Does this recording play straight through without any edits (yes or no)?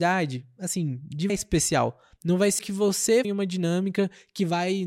no